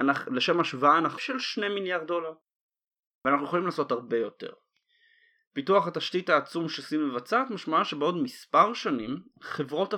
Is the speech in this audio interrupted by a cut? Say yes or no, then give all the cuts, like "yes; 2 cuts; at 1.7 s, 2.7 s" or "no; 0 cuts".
yes; 1 cut; at 1.2 s